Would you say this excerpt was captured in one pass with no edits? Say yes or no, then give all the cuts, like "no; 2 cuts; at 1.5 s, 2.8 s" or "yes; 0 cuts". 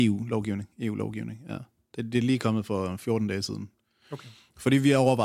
yes; 0 cuts